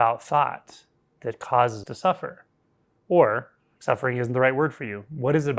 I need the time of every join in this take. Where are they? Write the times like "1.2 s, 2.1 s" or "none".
1.8 s, 3.8 s